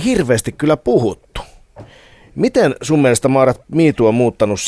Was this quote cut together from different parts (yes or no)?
no